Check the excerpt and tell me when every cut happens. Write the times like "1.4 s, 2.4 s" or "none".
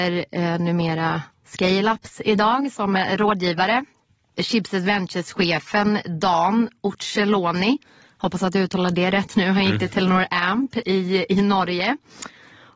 none

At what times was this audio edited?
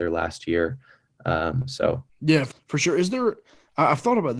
2.1 s, 2.5 s

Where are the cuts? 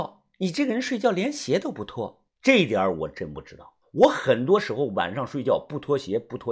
2.3 s, 3.8 s

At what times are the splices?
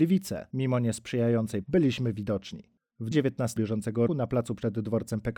1.6 s, 3.1 s, 3.6 s, 4.1 s

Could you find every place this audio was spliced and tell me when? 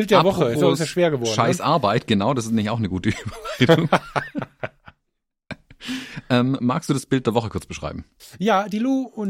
none

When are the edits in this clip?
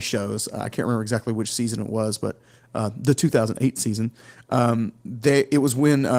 none

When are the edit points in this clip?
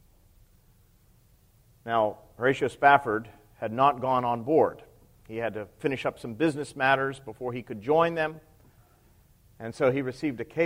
none

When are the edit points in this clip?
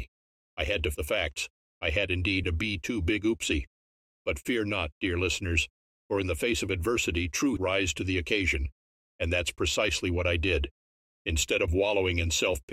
0.9 s, 2.4 s, 7.6 s

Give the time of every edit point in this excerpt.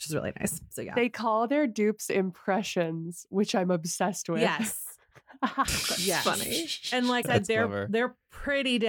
7.2 s

